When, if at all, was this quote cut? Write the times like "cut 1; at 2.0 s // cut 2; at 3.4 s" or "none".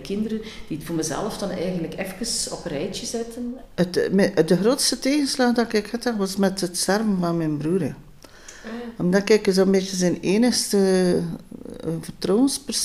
none